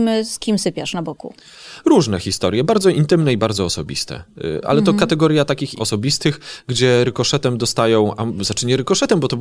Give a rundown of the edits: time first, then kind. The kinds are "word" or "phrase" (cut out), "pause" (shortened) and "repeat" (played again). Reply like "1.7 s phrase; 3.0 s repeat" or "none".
5.8 s word